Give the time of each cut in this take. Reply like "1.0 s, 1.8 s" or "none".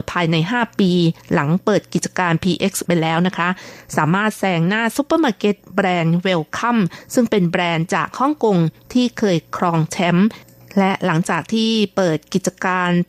2.9 s